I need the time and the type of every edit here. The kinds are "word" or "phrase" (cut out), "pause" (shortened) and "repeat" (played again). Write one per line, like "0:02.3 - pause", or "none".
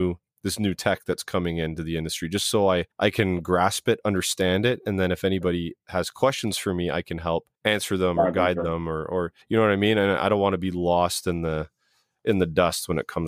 0:02.9 - pause
0:07.5 - pause
0:09.4 - pause